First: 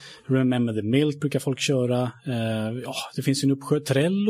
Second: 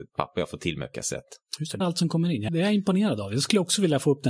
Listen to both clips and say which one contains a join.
second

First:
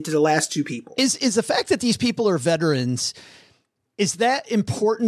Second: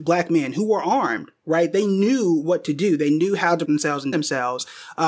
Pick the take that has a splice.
second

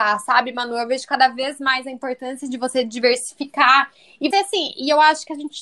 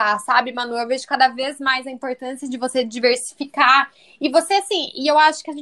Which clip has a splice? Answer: first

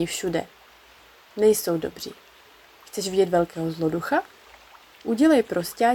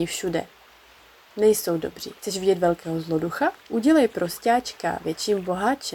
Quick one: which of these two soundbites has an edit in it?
second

